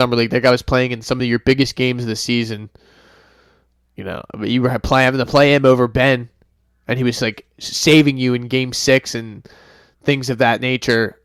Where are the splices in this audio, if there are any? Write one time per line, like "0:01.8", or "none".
none